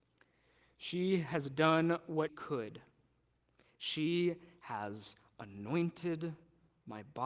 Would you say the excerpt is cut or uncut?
cut